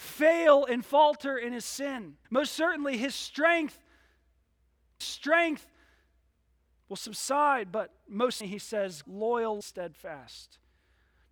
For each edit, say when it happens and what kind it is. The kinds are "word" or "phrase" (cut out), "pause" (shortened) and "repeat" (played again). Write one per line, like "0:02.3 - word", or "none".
0:02.2 - pause
0:05.0 - repeat
0:08.4 - word
0:09.0 - word
0:09.6 - phrase

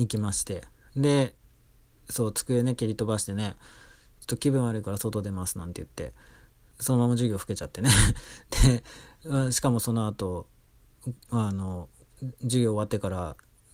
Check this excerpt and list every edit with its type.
none

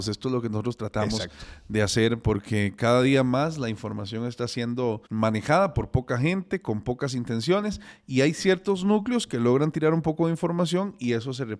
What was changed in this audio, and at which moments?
0:05.1 - pause

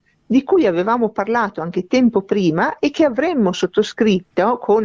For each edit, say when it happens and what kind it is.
none

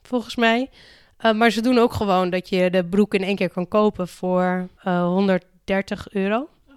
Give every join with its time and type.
0:04.8 - pause

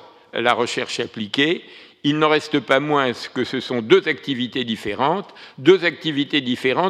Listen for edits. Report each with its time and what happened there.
none

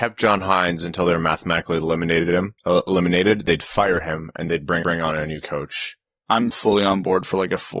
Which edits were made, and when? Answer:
0:02.6 - pause
0:04.5 - word
0:04.8 - repeat
0:06.5 - word

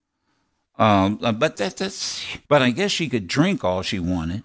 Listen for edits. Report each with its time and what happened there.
0:01.5 - word
0:02.4 - pause

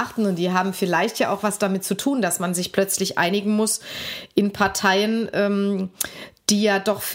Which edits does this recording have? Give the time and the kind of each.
none

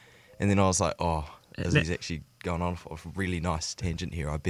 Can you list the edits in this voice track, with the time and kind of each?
none

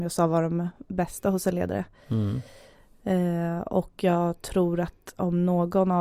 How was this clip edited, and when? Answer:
none

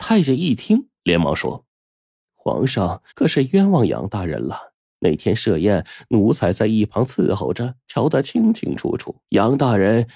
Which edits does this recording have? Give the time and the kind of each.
0:01.0 - pause
0:01.7 - pause
0:03.1 - pause
0:09.2 - pause

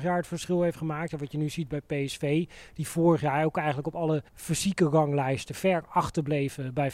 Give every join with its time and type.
0:04.3 - pause

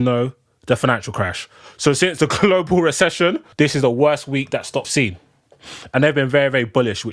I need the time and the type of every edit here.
0:03.5 - pause
0:04.8 - word

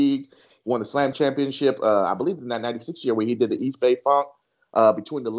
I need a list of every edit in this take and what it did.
0:01.1 - word

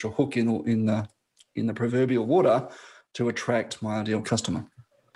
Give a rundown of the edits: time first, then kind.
none

